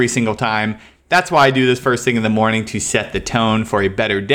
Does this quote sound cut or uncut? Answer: uncut